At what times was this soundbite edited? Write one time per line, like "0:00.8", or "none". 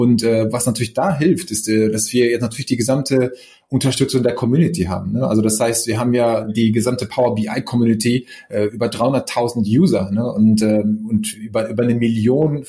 none